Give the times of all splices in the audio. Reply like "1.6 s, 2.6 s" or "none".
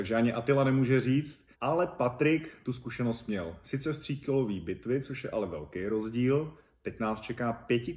1.5 s